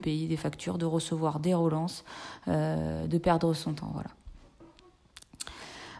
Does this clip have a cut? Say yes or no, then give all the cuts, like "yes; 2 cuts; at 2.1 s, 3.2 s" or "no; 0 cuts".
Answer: no; 0 cuts